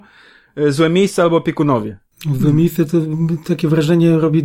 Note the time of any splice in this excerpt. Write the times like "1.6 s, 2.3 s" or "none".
none